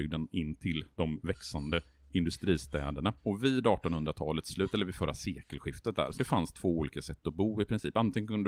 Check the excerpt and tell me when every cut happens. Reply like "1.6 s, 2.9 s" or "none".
0.9 s, 3.2 s, 6.1 s